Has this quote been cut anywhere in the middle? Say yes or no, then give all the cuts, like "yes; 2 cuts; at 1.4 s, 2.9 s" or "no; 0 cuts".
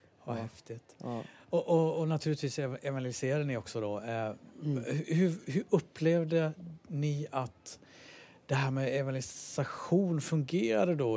no; 0 cuts